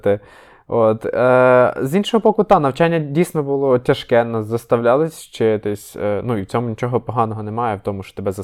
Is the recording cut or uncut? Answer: uncut